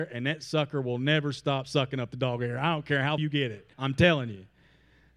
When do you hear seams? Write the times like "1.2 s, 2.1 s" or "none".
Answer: 3.2 s, 3.7 s